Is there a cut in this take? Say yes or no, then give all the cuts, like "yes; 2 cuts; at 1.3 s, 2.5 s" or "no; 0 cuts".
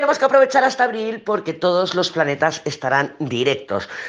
no; 0 cuts